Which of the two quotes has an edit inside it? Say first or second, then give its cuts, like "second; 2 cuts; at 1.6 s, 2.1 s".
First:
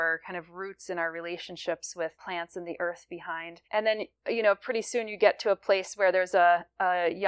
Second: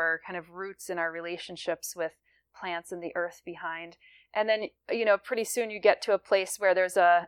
first; 2 cuts; at 2.1 s, 3.6 s